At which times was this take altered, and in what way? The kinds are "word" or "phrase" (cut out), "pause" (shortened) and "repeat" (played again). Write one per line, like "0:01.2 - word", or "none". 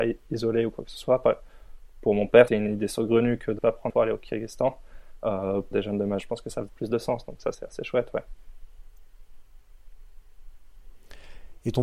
0:02.5 - word
0:03.6 - word
0:03.9 - word
0:05.7 - word
0:06.2 - word
0:06.7 - word
0:07.5 - word